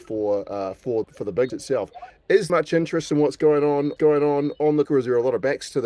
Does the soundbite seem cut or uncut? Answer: cut